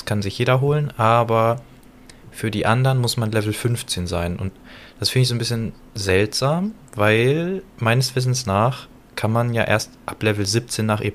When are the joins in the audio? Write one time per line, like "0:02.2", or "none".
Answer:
none